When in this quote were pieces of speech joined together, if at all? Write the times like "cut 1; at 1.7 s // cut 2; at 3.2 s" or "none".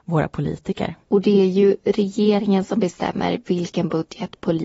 cut 1; at 1.0 s